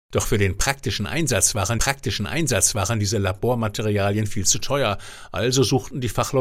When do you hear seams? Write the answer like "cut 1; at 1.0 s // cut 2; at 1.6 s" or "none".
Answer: cut 1; at 1.8 s